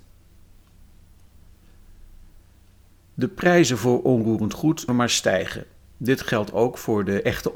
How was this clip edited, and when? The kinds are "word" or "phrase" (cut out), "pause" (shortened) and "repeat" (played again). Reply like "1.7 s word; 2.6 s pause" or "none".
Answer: 4.9 s word